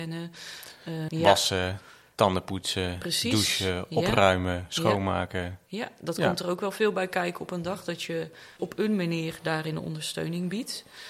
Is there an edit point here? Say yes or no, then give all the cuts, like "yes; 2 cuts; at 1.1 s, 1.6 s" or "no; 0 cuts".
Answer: yes; 2 cuts; at 1.1 s, 8.6 s